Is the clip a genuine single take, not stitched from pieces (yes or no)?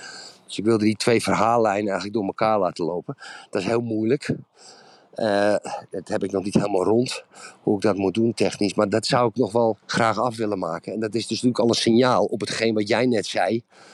no